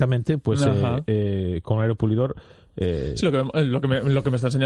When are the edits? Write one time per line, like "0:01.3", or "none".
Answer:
none